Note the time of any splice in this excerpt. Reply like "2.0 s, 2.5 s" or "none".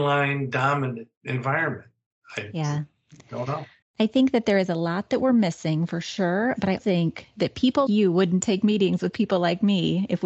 3.8 s, 6.8 s, 7.9 s